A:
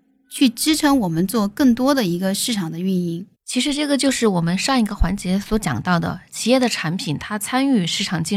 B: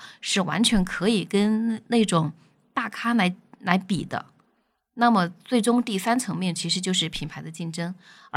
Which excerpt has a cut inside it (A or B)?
A